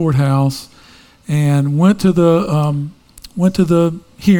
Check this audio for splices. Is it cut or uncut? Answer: uncut